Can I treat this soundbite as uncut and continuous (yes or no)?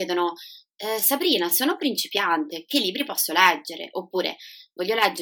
yes